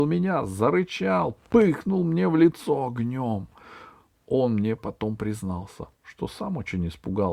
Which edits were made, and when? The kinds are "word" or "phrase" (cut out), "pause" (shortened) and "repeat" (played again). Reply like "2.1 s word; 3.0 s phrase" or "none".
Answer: none